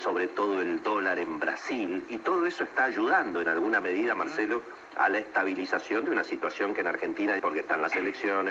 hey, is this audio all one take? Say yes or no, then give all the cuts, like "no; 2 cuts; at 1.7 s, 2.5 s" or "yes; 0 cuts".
no; 1 cut; at 7.4 s